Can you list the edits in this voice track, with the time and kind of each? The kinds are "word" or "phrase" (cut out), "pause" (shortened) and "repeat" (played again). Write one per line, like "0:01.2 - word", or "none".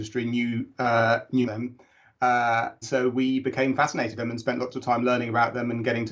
0:01.4 - phrase
0:02.8 - word
0:04.2 - word